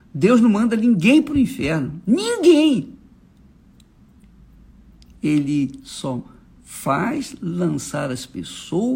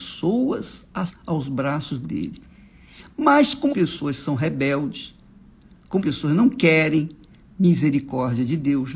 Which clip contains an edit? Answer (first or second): second